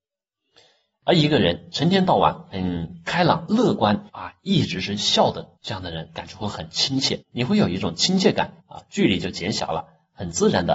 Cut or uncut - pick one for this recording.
cut